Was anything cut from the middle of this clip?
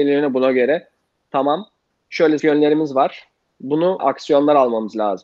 yes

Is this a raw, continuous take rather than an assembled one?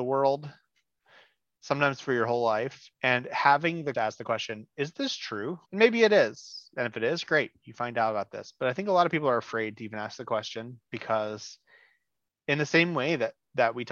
no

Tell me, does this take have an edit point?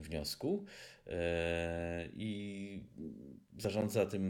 no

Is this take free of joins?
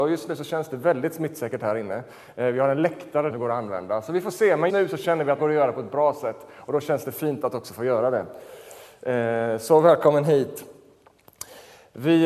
no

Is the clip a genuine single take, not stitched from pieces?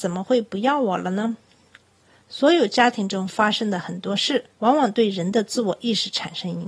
no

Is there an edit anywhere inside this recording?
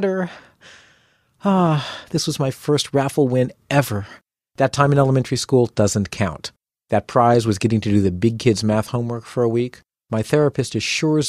no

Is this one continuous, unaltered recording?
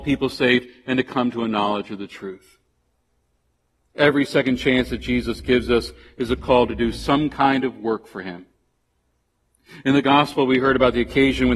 yes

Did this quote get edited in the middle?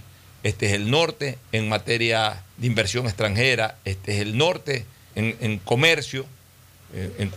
yes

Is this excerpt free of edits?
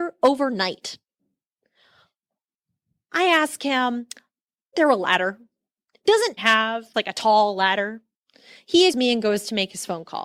no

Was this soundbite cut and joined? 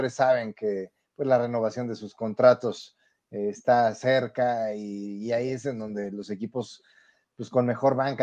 no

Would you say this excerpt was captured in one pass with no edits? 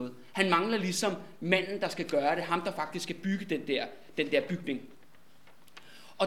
yes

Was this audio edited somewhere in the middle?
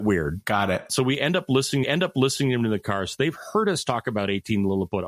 yes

